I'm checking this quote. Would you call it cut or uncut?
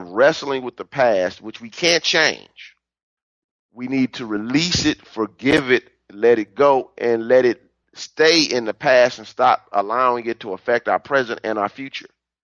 cut